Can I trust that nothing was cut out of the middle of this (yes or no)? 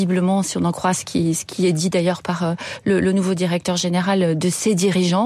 yes